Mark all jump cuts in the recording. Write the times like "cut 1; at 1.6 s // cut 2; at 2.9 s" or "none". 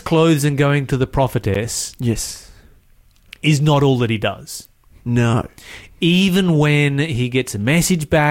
none